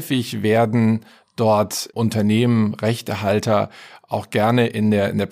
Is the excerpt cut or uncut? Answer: uncut